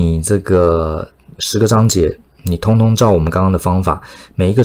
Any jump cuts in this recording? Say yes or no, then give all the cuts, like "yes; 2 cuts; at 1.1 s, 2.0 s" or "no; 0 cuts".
no; 0 cuts